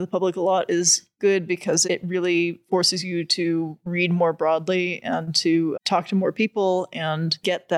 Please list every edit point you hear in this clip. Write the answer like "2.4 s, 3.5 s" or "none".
1.8 s, 5.7 s